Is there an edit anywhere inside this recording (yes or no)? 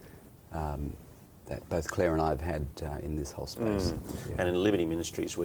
yes